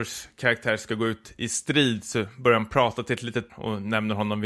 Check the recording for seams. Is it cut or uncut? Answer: cut